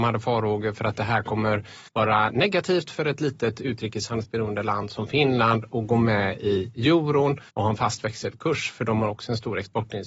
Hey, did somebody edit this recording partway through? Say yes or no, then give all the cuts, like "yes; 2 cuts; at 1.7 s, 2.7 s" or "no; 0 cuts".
yes; 2 cuts; at 1.9 s, 7.5 s